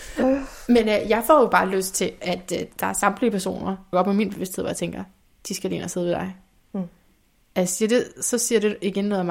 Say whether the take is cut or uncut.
cut